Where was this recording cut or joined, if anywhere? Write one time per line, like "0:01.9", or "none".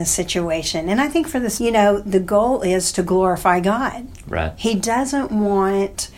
0:01.6